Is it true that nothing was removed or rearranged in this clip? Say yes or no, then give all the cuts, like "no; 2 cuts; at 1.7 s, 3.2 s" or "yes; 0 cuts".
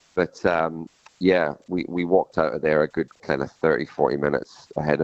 yes; 0 cuts